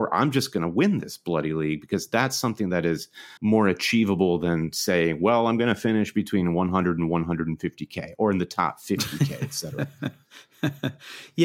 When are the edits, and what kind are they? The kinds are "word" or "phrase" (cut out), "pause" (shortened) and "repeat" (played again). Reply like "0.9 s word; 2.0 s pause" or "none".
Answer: 3.4 s pause